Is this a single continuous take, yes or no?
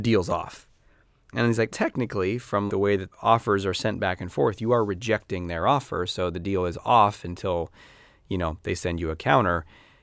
no